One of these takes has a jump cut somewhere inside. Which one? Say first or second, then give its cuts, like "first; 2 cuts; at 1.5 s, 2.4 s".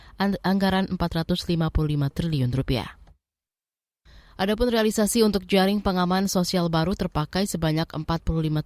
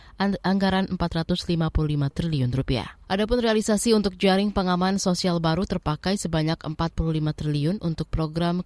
second; 1 cut; at 3.0 s